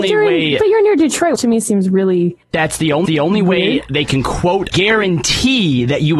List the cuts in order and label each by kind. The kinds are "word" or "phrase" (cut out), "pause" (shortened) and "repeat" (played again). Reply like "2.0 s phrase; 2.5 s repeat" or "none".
1.4 s word; 2.4 s pause; 3.1 s repeat; 4.7 s word

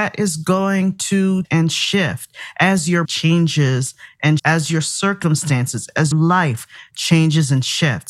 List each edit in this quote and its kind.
1.4 s word; 3.0 s word; 4.4 s word; 6.1 s word

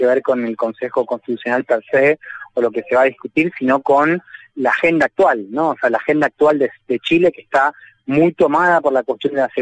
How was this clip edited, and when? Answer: none

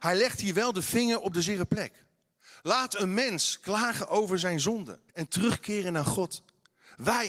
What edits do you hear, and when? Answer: 5.1 s pause

